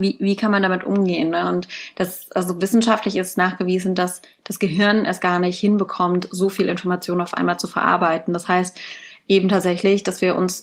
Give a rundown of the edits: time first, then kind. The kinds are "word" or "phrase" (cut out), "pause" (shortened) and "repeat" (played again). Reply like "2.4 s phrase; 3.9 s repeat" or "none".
none